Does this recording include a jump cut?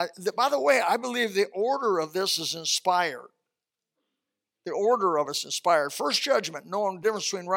no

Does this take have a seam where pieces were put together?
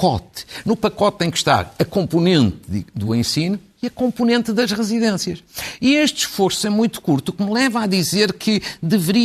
no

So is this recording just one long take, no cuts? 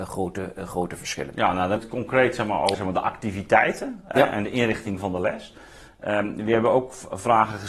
no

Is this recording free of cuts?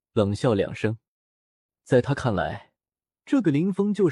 yes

